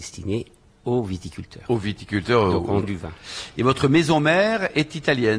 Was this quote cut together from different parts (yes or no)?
yes